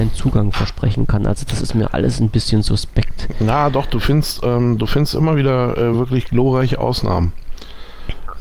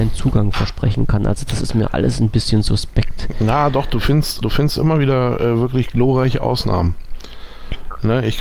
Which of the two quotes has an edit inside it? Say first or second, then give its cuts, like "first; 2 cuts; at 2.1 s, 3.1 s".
second; 1 cut; at 4.4 s